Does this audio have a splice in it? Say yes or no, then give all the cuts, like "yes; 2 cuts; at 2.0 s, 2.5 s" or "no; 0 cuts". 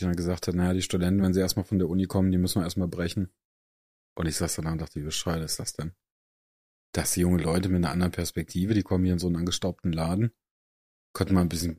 no; 0 cuts